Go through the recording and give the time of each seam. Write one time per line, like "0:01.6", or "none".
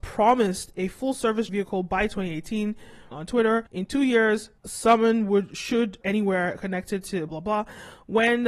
0:01.5
0:03.1
0:03.7
0:04.6
0:06.0
0:07.3